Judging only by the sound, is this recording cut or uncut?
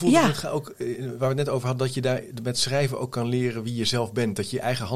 uncut